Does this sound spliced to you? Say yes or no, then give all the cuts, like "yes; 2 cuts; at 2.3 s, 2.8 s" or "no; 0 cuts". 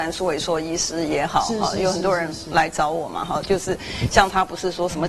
no; 0 cuts